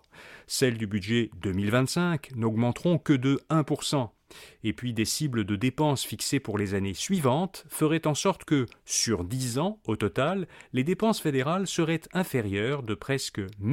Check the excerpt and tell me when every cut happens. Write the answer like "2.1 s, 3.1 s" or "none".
none

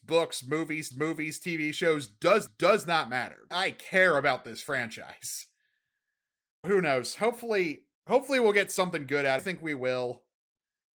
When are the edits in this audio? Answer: 0.9 s, 2.5 s, 3.5 s, 6.6 s, 8.0 s, 9.4 s

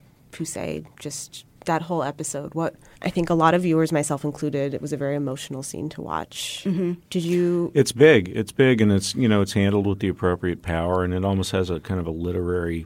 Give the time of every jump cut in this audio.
2.9 s

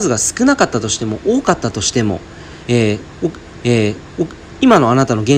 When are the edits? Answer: 3.6 s

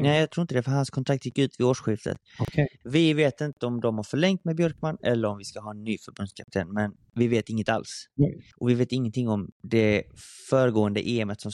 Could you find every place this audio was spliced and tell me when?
8.5 s, 9.5 s

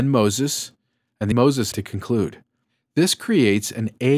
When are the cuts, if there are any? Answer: 1.3 s, 1.7 s

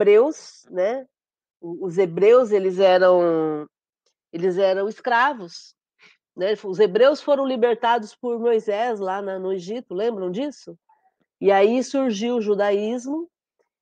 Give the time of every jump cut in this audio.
none

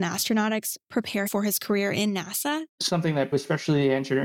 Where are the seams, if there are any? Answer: 1.3 s, 2.7 s, 3.3 s

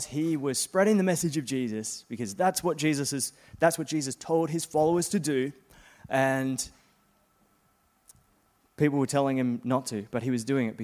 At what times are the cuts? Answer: none

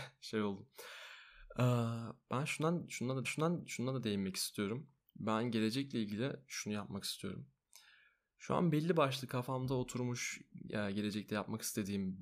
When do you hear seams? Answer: 3.2 s

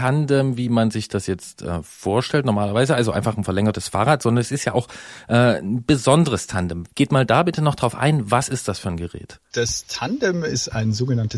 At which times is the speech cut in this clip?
none

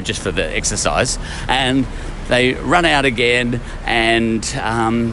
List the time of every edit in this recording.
none

